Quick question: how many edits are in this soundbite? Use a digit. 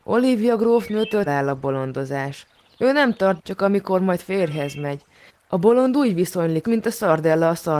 3